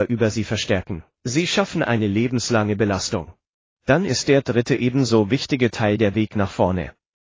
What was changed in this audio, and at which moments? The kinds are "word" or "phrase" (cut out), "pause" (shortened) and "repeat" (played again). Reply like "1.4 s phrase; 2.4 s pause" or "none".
1.1 s pause; 3.6 s pause

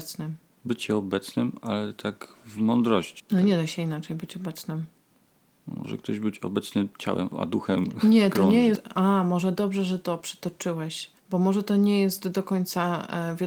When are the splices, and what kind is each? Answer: 11.2 s pause

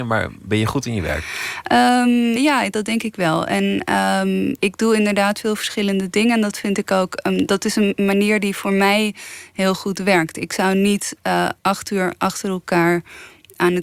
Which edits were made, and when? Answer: 2.4 s word; 4.6 s word; 11.6 s pause

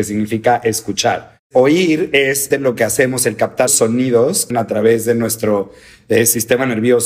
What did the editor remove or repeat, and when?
2.5 s word; 3.7 s word; 4.5 s word

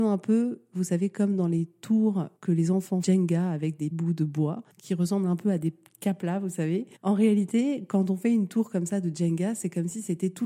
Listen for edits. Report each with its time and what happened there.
2.4 s pause; 3.0 s phrase; 3.9 s word; 7.0 s pause

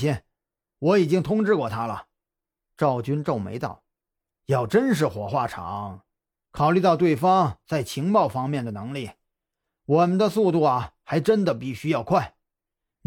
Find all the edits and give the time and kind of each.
none

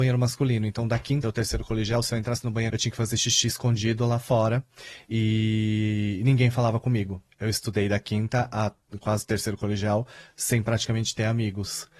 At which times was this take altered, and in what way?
1.2 s word; 2.7 s phrase; 7.3 s pause

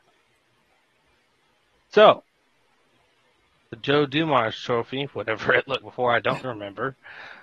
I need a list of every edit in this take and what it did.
5.8 s word; 6.4 s word

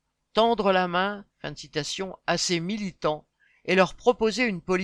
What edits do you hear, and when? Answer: 1.3 s pause

